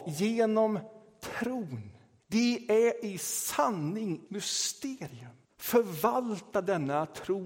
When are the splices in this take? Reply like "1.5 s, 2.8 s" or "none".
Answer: 2.2 s, 4.3 s, 5.4 s